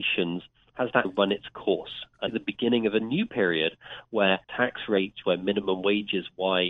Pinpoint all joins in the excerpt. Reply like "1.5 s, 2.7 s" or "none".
1.0 s, 2.3 s, 4.4 s, 5.2 s